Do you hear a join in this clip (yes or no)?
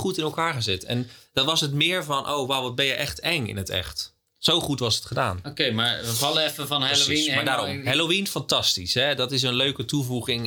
no